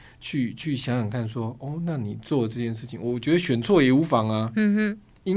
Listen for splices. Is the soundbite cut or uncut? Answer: uncut